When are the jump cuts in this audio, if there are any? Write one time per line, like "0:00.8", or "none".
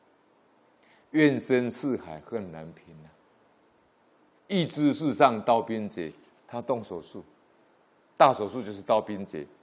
none